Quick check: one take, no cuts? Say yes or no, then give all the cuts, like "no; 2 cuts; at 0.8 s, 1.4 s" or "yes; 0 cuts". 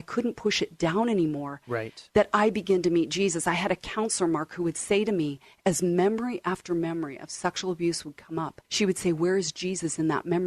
no; 1 cut; at 8.6 s